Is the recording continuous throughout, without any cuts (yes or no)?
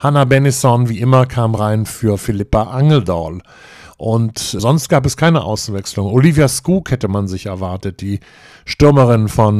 yes